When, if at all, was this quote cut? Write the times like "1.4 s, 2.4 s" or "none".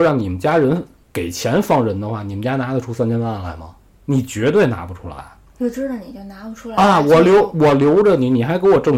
3.9 s